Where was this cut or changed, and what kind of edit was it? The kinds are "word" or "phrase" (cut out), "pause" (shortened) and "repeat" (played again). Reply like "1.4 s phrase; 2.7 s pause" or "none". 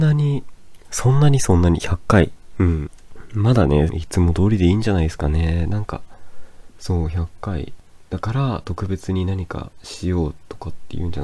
3.9 s phrase